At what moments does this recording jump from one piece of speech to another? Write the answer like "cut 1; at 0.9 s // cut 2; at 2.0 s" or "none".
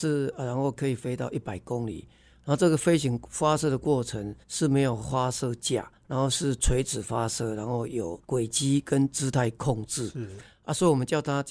cut 1; at 4.4 s // cut 2; at 6.0 s // cut 3; at 8.2 s